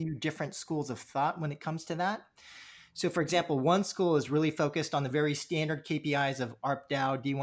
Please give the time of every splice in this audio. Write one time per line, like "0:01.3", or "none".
none